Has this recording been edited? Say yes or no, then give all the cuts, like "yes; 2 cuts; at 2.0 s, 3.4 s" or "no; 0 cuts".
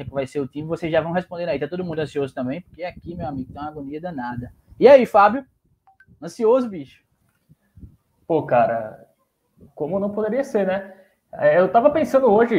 no; 0 cuts